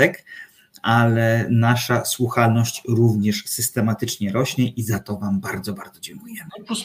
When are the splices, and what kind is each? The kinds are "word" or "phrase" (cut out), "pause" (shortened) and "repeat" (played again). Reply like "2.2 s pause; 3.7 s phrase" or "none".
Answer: none